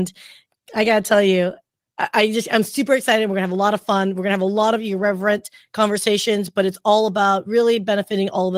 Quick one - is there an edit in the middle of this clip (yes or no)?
no